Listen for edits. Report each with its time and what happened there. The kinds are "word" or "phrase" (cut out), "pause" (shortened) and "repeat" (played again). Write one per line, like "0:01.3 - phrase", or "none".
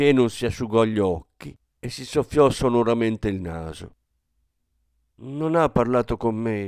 none